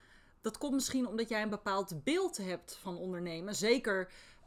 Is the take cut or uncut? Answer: uncut